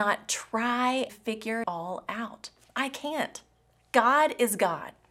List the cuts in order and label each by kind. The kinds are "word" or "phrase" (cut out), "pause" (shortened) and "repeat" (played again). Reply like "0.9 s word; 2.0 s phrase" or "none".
1.1 s word; 1.6 s word